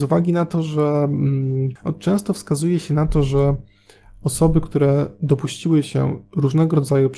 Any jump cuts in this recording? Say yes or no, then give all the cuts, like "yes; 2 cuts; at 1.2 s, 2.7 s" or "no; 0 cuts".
no; 0 cuts